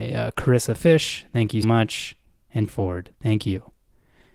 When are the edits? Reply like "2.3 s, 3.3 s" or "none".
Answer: 1.6 s, 2.7 s, 3.1 s